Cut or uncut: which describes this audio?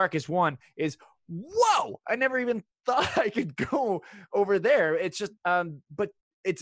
cut